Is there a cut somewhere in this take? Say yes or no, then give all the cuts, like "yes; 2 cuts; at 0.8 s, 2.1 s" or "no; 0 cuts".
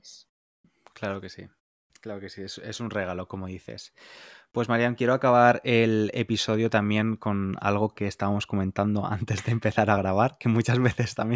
no; 0 cuts